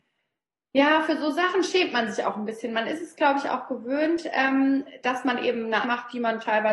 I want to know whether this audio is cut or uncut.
cut